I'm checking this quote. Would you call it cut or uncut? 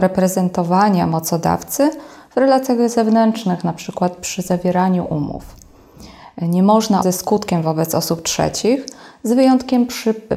cut